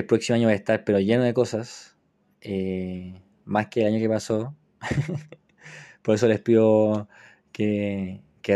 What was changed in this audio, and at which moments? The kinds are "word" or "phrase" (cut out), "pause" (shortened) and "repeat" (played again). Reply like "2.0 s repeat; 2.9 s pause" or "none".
none